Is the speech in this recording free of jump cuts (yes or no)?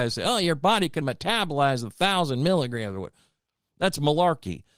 no